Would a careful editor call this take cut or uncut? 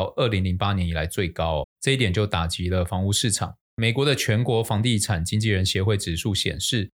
cut